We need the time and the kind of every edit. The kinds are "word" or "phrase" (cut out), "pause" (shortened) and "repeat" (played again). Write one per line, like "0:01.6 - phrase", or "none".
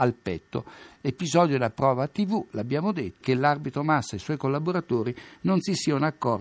0:03.2 - word